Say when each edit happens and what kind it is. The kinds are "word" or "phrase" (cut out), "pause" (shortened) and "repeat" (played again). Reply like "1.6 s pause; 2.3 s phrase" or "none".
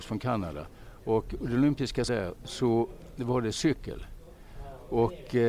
2.1 s word